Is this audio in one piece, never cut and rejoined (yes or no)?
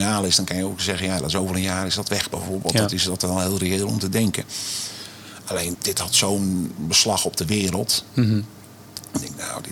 no